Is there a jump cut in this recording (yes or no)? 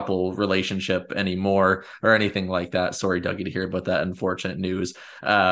no